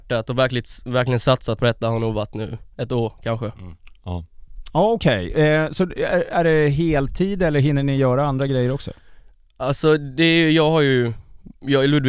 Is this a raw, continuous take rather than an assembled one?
yes; 0 cuts

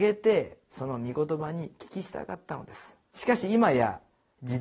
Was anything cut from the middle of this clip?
yes; 1 cut; at 3.0 s

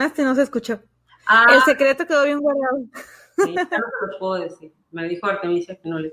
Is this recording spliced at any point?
no; 0 cuts

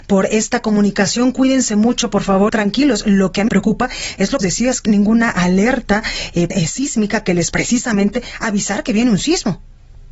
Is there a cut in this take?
yes; 6 cuts; at 2.5 s, 3.5 s, 4.4 s, 4.9 s, 6.5 s, 7.5 s

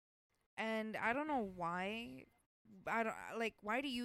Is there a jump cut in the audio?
no; 0 cuts

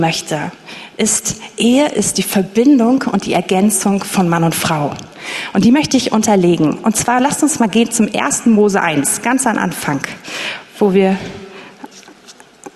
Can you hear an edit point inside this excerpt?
no; 0 cuts

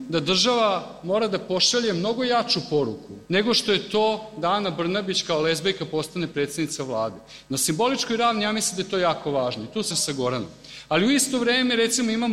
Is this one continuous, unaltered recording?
no; 2 cuts; at 3.3 s, 9.9 s

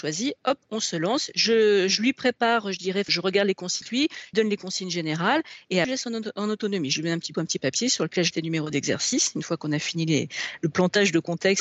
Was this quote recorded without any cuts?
no; 6 cuts; at 3.1 s, 3.8 s, 4.3 s, 5.8 s, 7.3 s, 8.3 s

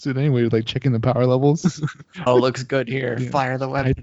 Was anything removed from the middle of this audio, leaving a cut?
yes; 1 cut; at 2.3 s

